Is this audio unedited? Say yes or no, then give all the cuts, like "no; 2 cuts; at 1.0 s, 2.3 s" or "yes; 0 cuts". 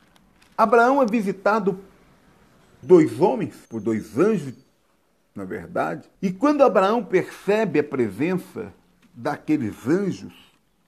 no; 3 cuts; at 2.8 s, 3.7 s, 6.1 s